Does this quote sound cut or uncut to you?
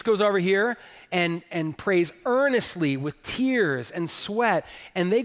uncut